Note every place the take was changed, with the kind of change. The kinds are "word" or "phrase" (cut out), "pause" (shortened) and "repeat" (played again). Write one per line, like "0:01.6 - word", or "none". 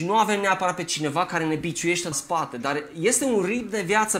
0:02.1 - word